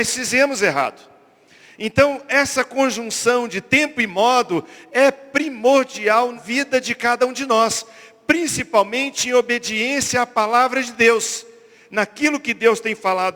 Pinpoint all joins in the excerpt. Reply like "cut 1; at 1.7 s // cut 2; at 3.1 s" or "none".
cut 1; at 6.4 s

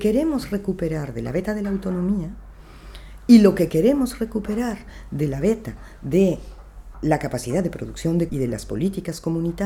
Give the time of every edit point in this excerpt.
cut 1; at 6.9 s // cut 2; at 8.3 s

